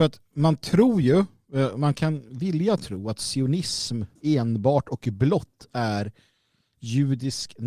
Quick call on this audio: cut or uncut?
cut